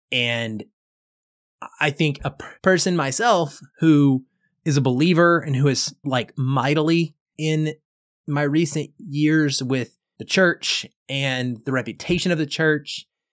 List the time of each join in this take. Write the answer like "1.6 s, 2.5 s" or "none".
2.2 s, 3.7 s, 6.0 s